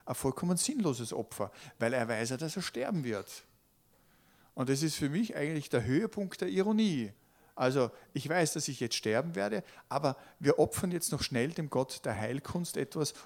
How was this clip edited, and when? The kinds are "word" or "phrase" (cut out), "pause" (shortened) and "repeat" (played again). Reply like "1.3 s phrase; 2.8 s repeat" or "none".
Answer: none